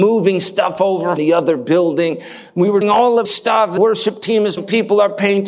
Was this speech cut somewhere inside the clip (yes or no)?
yes